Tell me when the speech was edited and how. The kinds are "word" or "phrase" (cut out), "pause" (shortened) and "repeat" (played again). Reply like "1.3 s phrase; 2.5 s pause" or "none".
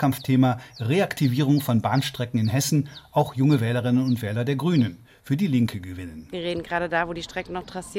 none